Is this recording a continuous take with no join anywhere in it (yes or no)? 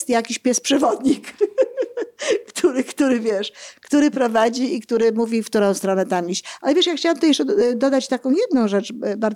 yes